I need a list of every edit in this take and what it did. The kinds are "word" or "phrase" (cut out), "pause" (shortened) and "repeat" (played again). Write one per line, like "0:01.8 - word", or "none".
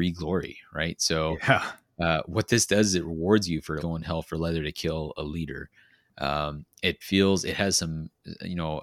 0:03.8 - word